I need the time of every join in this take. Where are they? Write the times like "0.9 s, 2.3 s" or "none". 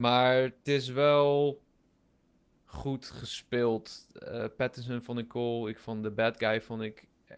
none

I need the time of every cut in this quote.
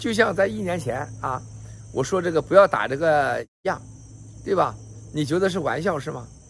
3.5 s

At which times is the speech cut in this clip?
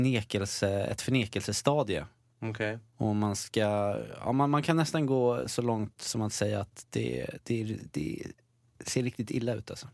none

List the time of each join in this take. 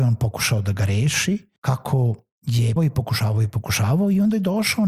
1.6 s, 2.8 s

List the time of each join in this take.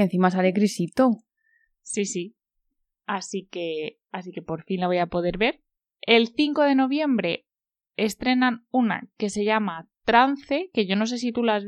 none

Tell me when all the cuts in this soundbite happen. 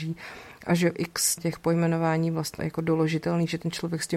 0.9 s, 1.4 s, 2.6 s

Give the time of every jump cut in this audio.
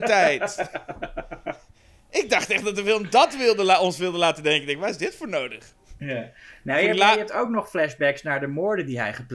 none

